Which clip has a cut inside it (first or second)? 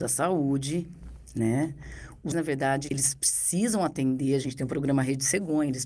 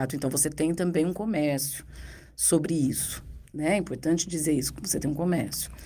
first